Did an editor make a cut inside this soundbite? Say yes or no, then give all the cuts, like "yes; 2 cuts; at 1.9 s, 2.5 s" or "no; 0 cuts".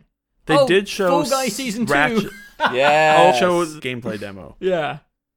yes; 2 cuts; at 3.3 s, 3.8 s